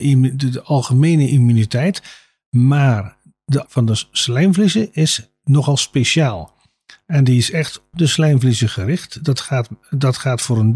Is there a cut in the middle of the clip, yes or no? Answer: yes